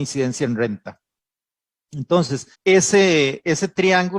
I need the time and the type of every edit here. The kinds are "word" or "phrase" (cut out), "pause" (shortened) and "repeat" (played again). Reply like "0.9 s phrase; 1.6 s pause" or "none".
2.5 s pause